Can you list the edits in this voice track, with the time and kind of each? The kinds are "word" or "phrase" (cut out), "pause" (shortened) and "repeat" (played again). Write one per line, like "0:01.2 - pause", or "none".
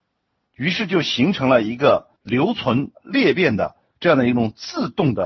0:02.2 - pause
0:03.0 - phrase